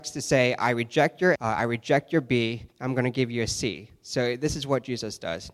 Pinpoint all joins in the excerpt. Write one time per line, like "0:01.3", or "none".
0:01.4
0:02.7